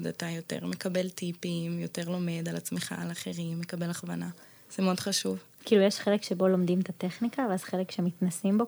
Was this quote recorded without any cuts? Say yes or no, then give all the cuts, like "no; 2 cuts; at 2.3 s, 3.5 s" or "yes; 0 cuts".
yes; 0 cuts